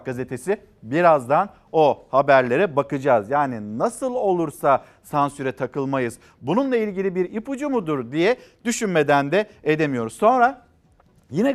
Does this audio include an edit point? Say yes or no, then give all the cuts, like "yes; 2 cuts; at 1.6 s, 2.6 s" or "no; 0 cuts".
no; 0 cuts